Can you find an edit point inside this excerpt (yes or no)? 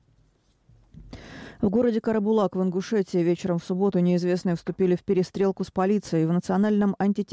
no